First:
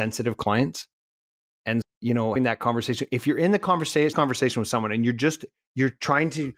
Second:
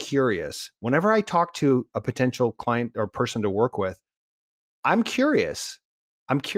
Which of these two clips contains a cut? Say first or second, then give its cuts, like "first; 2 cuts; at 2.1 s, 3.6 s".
first; 3 cuts; at 1.8 s, 2.4 s, 4.1 s